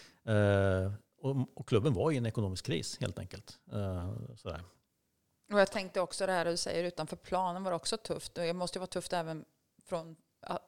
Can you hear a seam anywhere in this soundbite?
no; 0 cuts

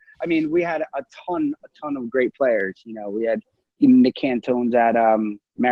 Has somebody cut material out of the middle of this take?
no; 0 cuts

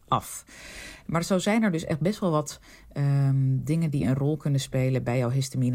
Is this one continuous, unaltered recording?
yes; 0 cuts

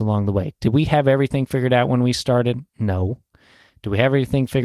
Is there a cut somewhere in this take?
yes; 1 cut; at 2.7 s

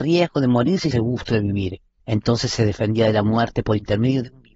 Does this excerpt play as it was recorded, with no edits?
no; 2 cuts; at 0.9 s, 2.0 s

